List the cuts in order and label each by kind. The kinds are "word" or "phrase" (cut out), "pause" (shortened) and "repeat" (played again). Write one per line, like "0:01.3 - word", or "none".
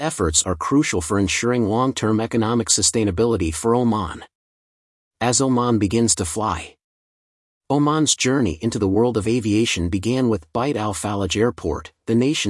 none